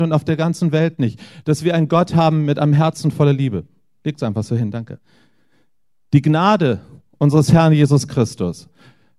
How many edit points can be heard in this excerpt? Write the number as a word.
zero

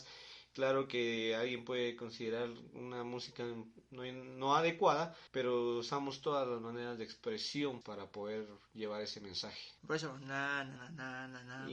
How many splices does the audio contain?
four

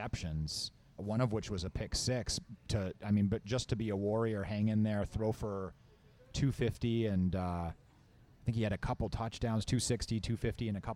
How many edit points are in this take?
one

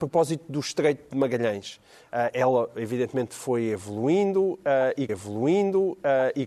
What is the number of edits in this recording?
one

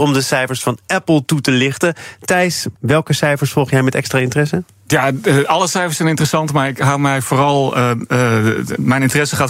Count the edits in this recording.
one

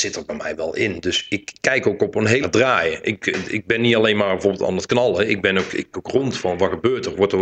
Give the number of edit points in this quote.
two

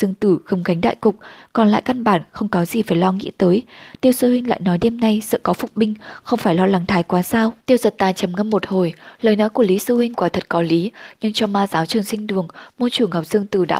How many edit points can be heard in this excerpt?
one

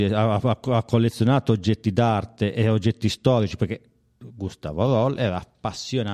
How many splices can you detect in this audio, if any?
zero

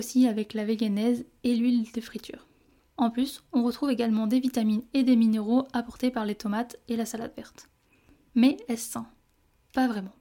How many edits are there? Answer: zero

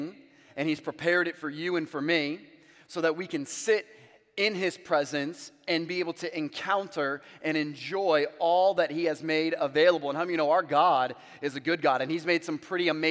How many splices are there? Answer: zero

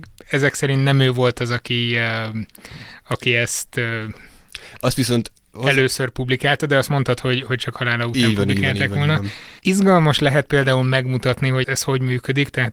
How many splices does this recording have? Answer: two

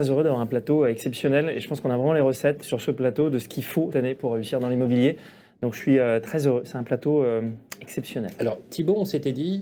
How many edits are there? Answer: two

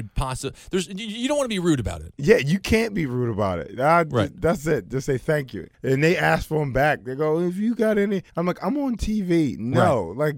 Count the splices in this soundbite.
two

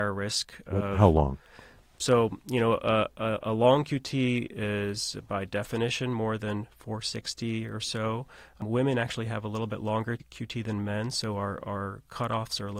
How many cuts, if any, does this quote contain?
zero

